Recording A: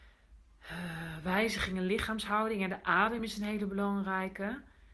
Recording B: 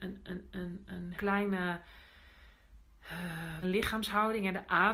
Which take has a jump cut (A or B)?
B